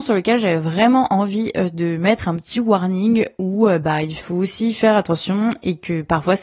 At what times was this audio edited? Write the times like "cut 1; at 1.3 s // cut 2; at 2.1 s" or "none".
none

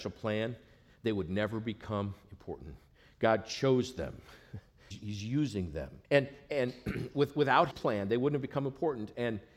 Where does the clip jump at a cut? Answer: cut 1; at 4.9 s // cut 2; at 6.0 s // cut 3; at 7.7 s

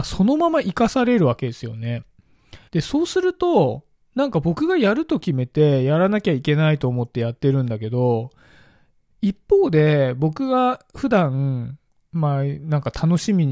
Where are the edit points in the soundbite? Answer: cut 1; at 2.7 s

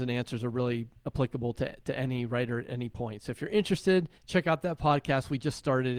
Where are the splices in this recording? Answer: cut 1; at 1.0 s // cut 2; at 4.2 s

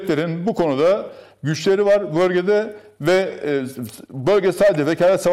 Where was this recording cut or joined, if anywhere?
none

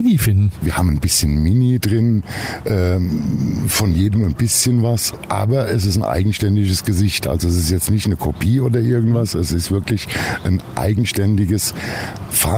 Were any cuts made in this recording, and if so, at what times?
none

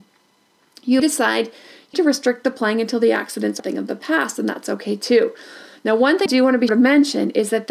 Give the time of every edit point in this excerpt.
cut 1; at 1.0 s // cut 2; at 1.9 s // cut 3; at 3.6 s // cut 4; at 6.3 s // cut 5; at 6.7 s

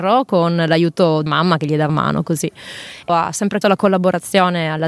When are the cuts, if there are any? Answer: cut 1; at 1.3 s // cut 2; at 1.9 s // cut 3; at 3.1 s // cut 4; at 3.6 s

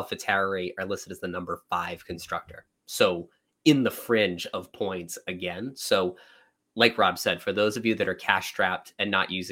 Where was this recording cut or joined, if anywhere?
none

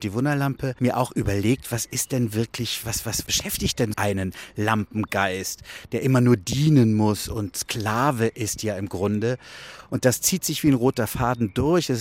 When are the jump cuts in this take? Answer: cut 1; at 2.8 s // cut 2; at 3.9 s

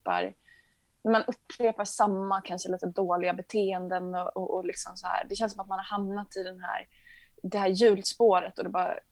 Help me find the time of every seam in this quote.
none

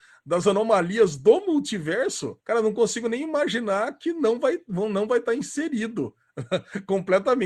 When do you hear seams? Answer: cut 1; at 2.4 s

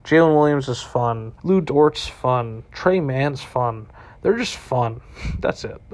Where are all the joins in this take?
cut 1; at 1.4 s

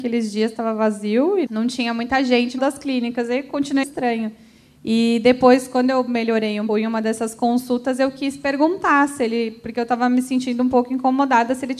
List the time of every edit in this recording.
cut 1; at 1.5 s // cut 2; at 2.6 s // cut 3; at 3.8 s // cut 4; at 6.7 s

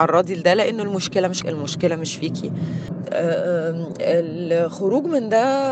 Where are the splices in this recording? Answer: cut 1; at 1.4 s

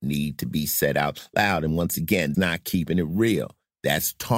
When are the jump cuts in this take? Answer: cut 1; at 2.3 s

